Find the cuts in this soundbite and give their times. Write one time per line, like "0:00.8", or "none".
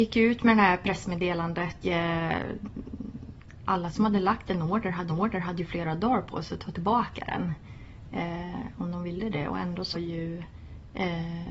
0:01.8
0:05.1
0:09.9